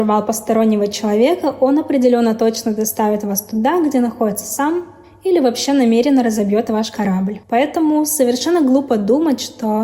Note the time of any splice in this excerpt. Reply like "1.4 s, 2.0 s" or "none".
7.4 s